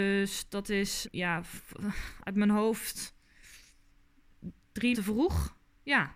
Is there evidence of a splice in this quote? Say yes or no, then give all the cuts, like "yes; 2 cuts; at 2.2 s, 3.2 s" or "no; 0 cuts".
yes; 2 cuts; at 1.0 s, 4.9 s